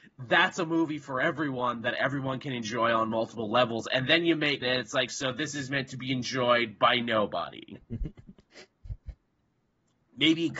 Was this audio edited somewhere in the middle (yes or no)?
yes